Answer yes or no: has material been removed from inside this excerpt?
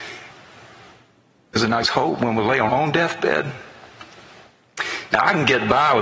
yes